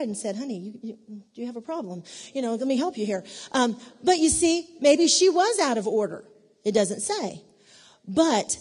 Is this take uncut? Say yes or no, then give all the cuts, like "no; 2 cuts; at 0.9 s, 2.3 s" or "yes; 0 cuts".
yes; 0 cuts